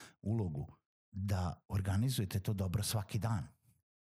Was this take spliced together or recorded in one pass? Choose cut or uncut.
cut